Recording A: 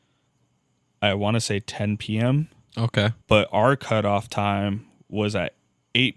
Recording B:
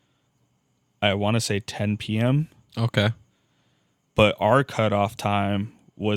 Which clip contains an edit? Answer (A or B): A